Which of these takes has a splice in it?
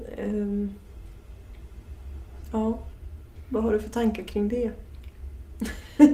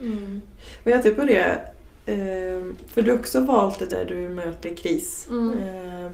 second; 4 cuts; at 1.0 s, 3.1 s, 3.9 s, 4.6 s

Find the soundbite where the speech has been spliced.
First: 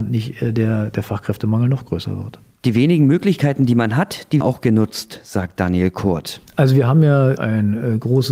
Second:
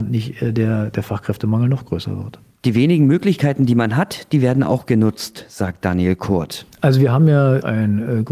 first; 1 cut; at 4.4 s

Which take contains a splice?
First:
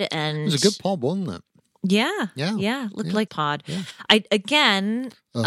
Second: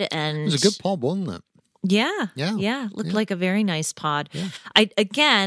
first; 1 cut; at 3.3 s

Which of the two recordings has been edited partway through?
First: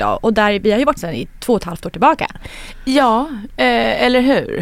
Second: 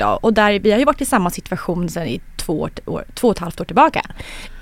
first; 2 cuts; at 1.0 s, 1.4 s

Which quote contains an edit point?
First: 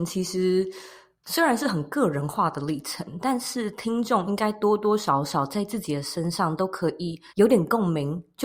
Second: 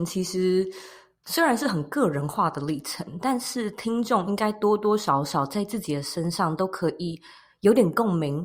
first; 1 cut; at 7.3 s

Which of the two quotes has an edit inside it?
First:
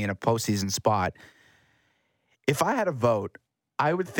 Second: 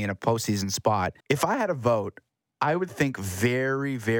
second; 1 cut; at 1.2 s

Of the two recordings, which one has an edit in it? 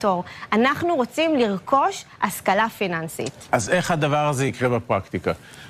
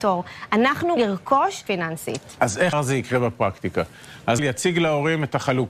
second; 4 cuts; at 1.0 s, 1.7 s, 2.7 s, 4.4 s

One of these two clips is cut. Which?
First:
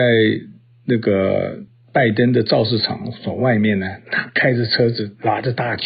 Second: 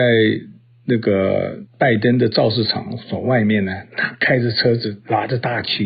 second; 1 cut; at 1.7 s

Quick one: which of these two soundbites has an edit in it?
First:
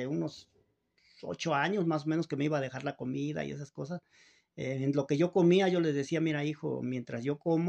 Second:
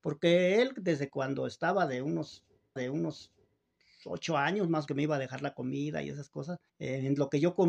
second; 3 cuts; at 2.8 s, 4.9 s, 6.7 s

